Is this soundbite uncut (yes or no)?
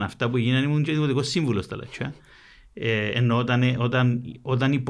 yes